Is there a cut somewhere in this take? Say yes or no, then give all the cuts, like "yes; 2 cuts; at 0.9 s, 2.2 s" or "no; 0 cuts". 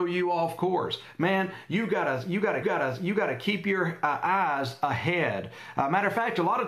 yes; 1 cut; at 2.6 s